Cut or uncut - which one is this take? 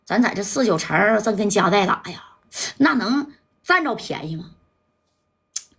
uncut